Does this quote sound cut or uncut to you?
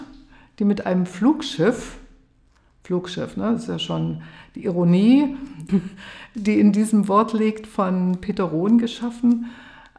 cut